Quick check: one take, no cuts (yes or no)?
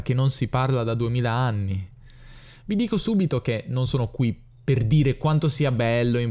yes